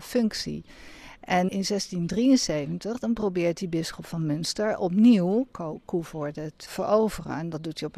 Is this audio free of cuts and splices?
no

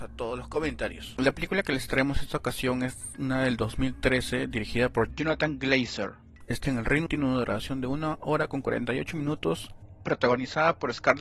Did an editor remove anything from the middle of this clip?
yes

